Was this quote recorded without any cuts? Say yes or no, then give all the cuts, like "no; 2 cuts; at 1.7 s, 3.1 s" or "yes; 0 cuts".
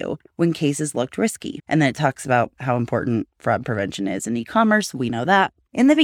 yes; 0 cuts